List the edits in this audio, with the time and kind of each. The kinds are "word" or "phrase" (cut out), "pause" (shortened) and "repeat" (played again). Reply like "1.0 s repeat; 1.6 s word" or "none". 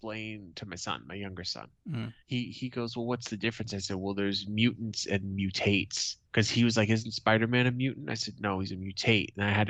2.2 s pause; 6.3 s pause